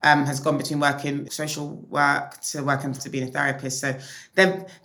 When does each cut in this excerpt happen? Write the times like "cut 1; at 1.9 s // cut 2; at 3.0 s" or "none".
cut 1; at 1.3 s // cut 2; at 3.0 s